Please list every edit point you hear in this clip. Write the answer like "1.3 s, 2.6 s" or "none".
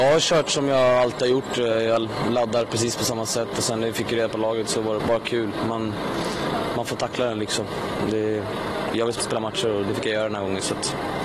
5.0 s, 9.2 s